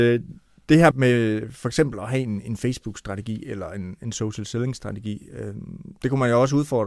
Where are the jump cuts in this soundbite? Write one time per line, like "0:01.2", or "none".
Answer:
0:00.9

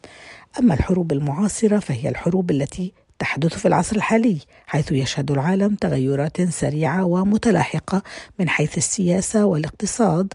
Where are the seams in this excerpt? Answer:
none

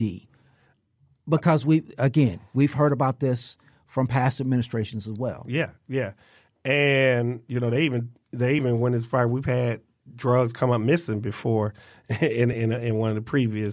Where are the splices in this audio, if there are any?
none

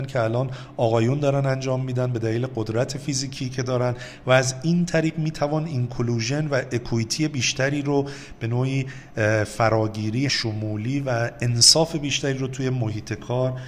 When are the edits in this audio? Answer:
0:10.3

